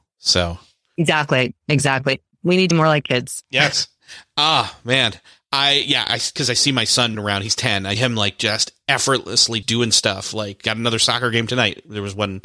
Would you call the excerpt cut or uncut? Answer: cut